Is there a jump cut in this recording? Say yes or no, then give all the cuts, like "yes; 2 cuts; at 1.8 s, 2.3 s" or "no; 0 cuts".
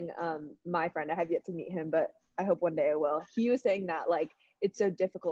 no; 0 cuts